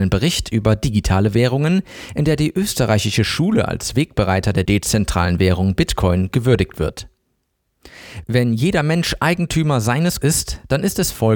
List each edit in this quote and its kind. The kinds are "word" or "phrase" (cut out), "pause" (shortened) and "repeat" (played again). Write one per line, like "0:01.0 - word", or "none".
0:04.6 - word
0:10.2 - word

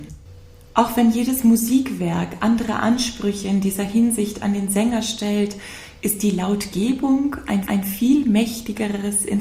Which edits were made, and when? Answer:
0:07.6 - repeat

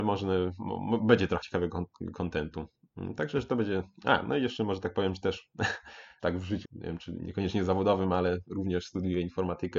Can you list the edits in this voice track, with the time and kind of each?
0:01.4 - word
0:03.3 - word
0:06.2 - word
0:06.6 - word

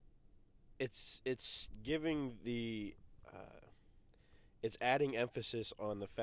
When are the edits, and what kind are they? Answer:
none

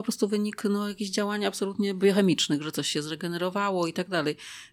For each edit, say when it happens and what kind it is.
none

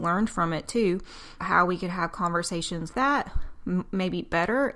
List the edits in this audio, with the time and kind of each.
0:01.4 - word
0:02.9 - word

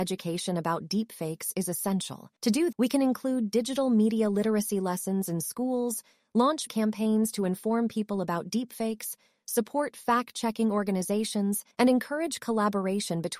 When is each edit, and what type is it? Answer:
0:02.4 - pause
0:02.7 - word
0:06.7 - word
0:11.7 - pause

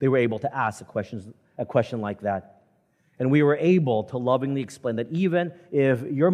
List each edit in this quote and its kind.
none

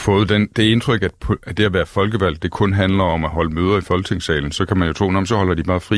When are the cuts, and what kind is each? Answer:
none

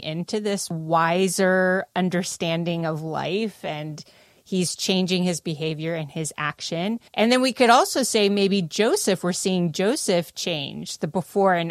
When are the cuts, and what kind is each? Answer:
0:07.1 - pause

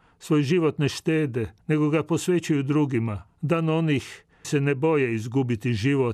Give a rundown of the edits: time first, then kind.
0:01.6 - pause
0:03.3 - pause
0:04.4 - word

